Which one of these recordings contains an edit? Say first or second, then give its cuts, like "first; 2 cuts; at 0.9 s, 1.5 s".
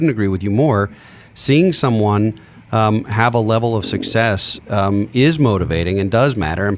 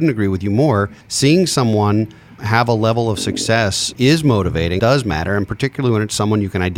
second; 4 cuts; at 1.0 s, 2.4 s, 3.9 s, 4.8 s